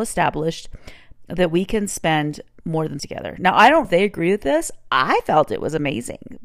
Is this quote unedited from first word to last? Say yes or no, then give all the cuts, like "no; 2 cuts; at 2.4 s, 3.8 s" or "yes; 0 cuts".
no; 2 cuts; at 3.0 s, 3.8 s